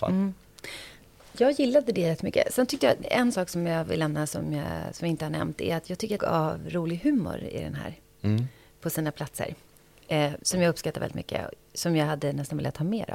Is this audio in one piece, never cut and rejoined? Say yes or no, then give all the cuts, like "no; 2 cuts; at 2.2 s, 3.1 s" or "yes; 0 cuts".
no; 1 cut; at 6.2 s